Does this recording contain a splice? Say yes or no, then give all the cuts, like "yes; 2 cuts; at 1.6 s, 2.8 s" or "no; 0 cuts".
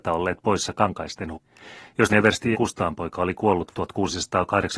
yes; 4 cuts; at 1.3 s, 2.1 s, 2.5 s, 3.7 s